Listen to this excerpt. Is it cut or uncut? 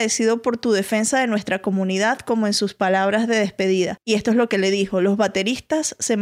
uncut